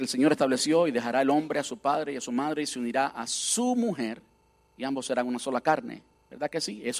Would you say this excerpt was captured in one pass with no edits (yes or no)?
yes